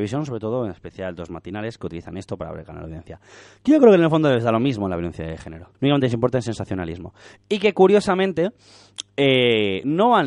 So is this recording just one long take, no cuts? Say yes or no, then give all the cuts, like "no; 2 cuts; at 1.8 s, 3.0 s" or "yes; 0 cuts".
no; 1 cut; at 5.7 s